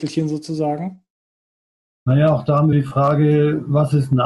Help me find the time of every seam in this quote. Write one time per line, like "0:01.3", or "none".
0:02.7